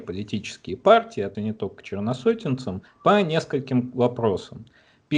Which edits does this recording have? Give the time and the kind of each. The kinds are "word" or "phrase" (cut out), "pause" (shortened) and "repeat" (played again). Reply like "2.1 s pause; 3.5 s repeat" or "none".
1.3 s word; 2.9 s pause